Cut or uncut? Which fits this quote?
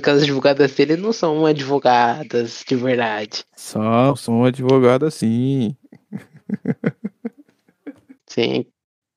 uncut